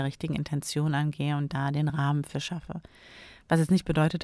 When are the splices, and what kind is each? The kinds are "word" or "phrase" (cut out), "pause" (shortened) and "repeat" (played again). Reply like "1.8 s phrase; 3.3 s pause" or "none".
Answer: none